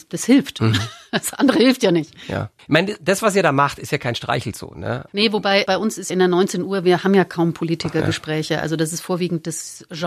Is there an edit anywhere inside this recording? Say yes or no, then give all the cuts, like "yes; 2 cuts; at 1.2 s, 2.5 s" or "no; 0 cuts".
yes; 3 cuts; at 2.6 s, 5.7 s, 6.1 s